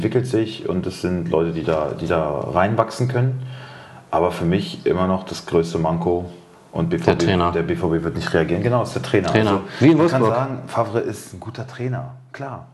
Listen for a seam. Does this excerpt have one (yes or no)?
no